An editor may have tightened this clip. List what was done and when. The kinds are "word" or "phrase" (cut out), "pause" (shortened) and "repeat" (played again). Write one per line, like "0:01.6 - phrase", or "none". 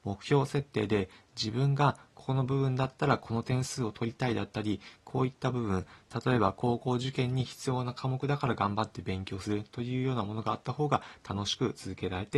none